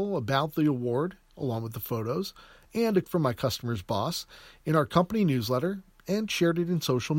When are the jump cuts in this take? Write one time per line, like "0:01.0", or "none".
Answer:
0:03.0

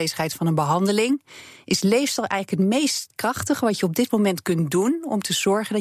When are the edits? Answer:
none

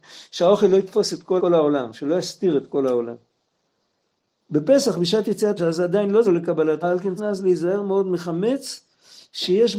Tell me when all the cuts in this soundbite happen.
0:01.4
0:05.6
0:06.2
0:06.8
0:07.2

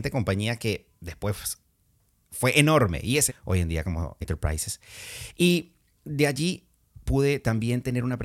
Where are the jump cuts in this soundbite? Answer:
0:03.3
0:04.2

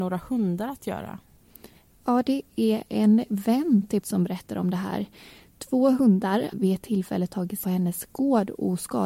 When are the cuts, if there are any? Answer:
0:04.0
0:06.5
0:07.6

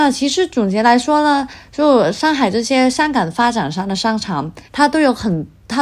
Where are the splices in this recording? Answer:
0:04.7

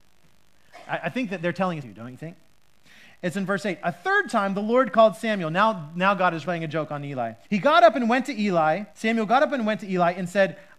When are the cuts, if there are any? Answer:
0:01.8
0:03.3
0:06.4
0:07.4
0:08.9

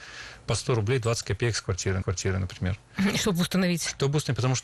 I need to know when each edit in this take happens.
0:02.0

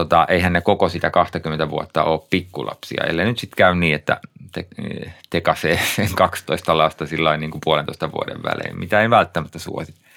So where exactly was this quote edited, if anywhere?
none

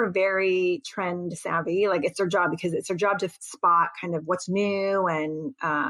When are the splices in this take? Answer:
none

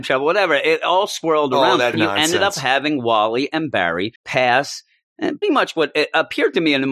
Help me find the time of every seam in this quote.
0:01.9
0:04.2
0:05.4

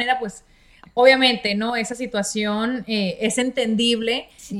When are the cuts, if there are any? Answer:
none

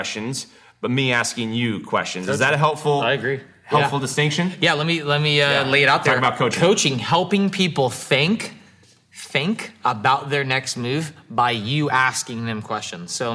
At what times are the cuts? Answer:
none

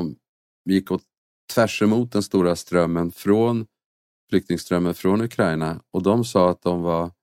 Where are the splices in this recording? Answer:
none

